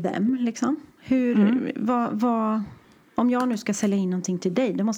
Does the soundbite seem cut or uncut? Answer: uncut